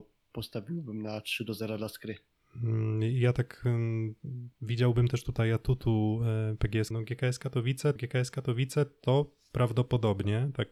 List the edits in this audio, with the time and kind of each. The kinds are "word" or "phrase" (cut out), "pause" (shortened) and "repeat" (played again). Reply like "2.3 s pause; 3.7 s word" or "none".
6.9 s phrase; 8.0 s repeat